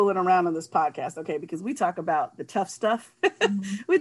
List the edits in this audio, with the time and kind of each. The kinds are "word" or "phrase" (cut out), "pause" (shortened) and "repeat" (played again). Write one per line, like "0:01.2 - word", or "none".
none